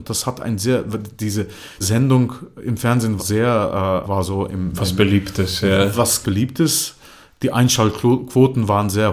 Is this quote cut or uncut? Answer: cut